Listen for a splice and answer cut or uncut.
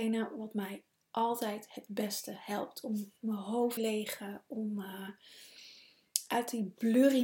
cut